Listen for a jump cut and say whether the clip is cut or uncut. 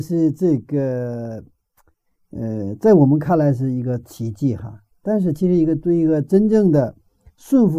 uncut